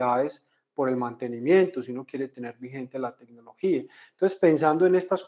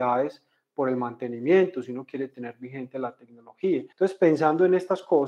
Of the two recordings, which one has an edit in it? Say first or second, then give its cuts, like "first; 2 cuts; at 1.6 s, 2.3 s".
second; 1 cut; at 3.9 s